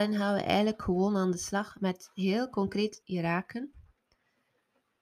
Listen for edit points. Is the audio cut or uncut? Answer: cut